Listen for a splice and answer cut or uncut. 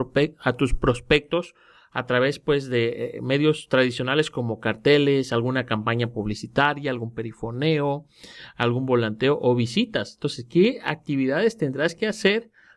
uncut